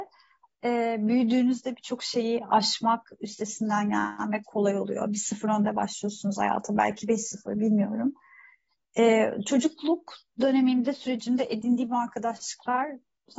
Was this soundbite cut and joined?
no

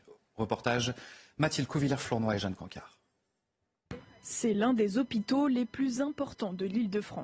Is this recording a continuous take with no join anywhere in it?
yes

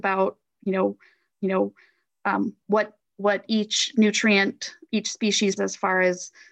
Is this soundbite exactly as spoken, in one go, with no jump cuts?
no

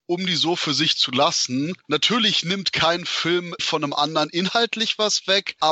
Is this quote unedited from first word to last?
no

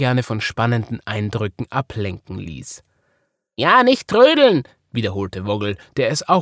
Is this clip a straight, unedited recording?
yes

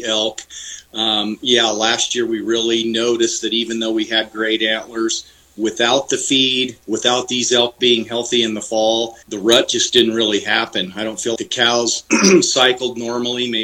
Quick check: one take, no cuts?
no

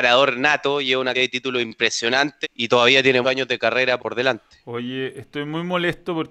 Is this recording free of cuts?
no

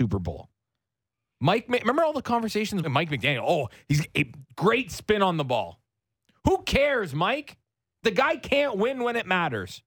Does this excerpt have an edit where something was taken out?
yes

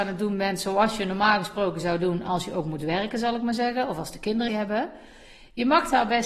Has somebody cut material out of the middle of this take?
yes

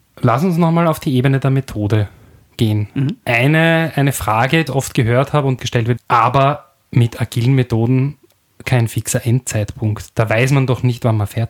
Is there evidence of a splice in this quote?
yes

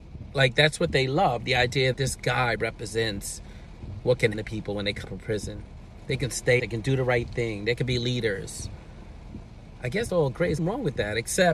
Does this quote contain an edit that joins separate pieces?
yes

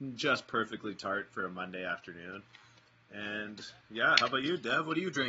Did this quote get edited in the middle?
no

